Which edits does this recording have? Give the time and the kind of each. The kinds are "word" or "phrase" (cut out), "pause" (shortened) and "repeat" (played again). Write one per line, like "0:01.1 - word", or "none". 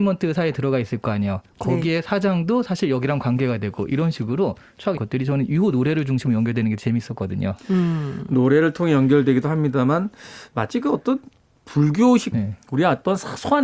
0:05.0 - word
0:12.3 - word